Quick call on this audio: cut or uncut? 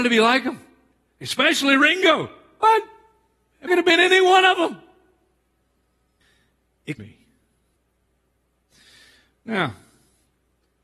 cut